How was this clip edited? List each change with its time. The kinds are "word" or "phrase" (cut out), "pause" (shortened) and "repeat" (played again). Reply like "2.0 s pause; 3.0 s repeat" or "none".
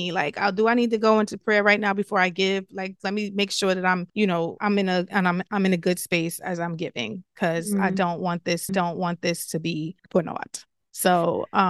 4.1 s pause; 4.6 s word; 8.7 s repeat; 10.0 s pause